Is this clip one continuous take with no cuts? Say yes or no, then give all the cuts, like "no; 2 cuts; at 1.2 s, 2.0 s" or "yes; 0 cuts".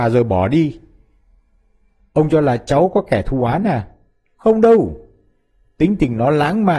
yes; 0 cuts